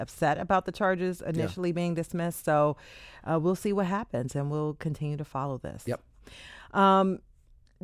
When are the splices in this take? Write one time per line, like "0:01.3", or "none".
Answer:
none

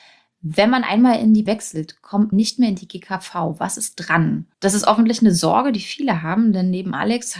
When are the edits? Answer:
0:01.5
0:02.3
0:04.5

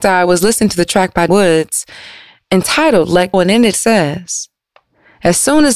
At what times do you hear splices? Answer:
0:01.3
0:03.3
0:03.7

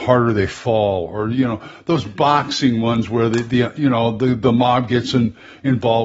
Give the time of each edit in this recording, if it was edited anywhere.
none

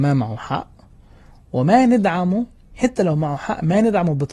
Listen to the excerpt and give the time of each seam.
none

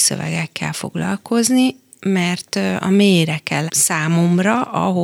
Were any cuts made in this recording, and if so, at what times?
0:03.7

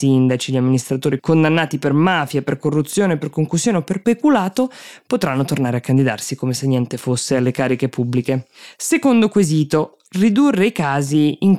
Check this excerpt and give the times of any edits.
0:01.2

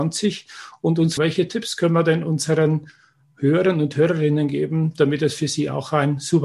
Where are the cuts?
0:01.2

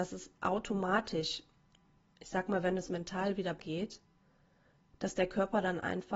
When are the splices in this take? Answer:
0:02.9
0:03.6

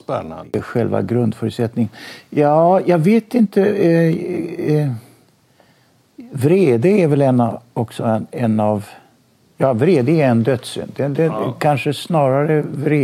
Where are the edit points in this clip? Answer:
none

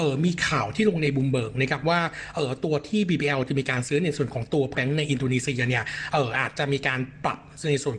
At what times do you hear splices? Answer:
0:04.7

